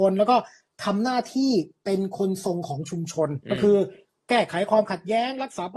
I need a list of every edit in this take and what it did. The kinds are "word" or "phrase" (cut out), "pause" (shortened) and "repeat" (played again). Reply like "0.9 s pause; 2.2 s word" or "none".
3.4 s pause